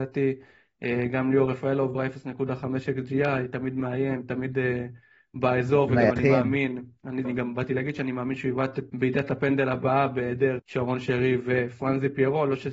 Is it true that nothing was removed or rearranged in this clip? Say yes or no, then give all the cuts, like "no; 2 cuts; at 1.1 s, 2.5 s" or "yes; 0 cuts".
no; 4 cuts; at 1.9 s, 7.2 s, 8.9 s, 10.6 s